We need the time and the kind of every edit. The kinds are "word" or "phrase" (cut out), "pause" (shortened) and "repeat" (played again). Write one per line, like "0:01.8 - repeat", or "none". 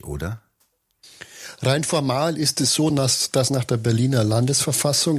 none

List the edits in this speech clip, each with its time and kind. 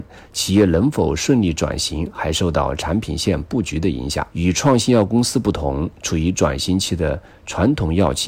0:04.3 - pause

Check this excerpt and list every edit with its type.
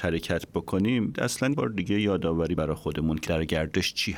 0:01.1 - word
0:01.5 - word
0:02.6 - word
0:03.3 - word

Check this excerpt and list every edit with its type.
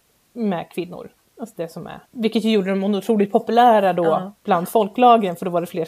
0:01.2 - pause
0:02.1 - pause

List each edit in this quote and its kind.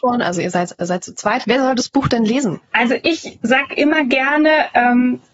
none

